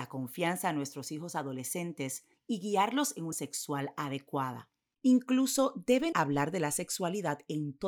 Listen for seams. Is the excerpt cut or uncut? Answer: cut